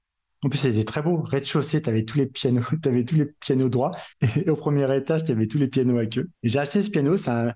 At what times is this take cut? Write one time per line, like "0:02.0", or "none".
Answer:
0:04.1
0:06.3